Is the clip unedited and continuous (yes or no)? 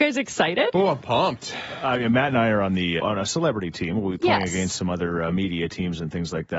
no